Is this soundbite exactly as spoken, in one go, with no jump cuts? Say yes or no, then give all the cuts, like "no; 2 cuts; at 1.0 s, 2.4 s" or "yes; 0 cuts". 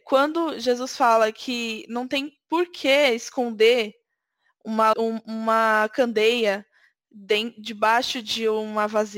no; 1 cut; at 4.9 s